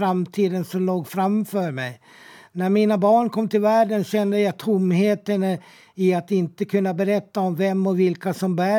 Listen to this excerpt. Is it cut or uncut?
uncut